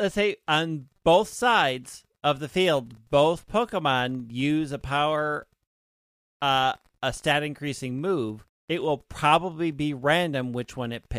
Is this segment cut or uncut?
cut